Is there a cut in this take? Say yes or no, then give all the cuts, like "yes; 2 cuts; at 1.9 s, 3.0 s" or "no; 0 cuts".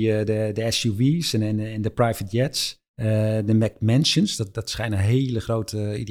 yes; 1 cut; at 2.9 s